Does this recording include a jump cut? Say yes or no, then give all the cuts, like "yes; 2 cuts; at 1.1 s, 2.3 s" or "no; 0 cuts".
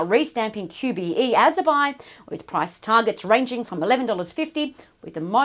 no; 0 cuts